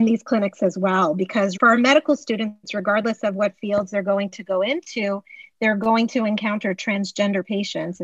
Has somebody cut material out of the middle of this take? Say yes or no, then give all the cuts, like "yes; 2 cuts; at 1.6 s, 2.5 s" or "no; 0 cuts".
no; 0 cuts